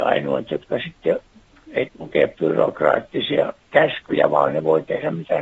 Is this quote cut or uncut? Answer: cut